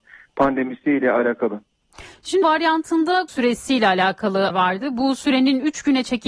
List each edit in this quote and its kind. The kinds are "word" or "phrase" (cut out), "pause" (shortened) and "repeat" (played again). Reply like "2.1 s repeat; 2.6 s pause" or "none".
2.4 s word; 3.3 s word; 4.5 s word